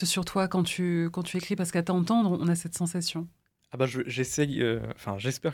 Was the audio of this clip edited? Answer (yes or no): no